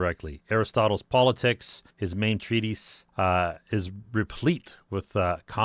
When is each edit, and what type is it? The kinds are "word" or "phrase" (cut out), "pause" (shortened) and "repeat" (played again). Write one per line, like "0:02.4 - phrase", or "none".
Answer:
0:01.9 - pause
0:02.4 - word
0:03.1 - pause